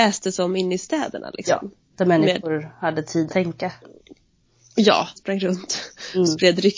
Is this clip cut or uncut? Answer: cut